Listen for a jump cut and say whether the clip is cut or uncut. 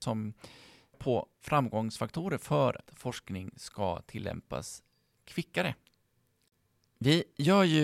cut